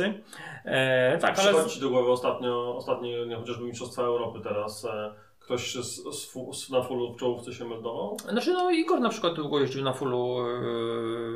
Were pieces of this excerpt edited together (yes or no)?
no